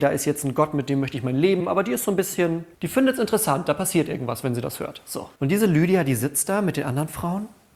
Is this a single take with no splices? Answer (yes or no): no